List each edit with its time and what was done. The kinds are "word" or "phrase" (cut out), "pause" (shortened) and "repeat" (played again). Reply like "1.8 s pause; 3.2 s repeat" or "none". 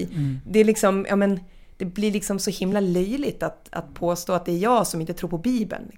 none